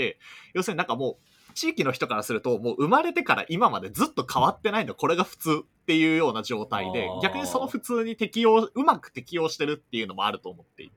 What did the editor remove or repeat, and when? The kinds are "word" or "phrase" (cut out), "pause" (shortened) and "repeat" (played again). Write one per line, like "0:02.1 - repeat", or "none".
0:01.3 - pause